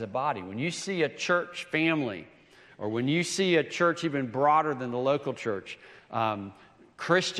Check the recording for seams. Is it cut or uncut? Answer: uncut